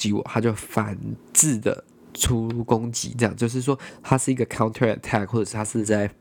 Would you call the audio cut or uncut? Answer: uncut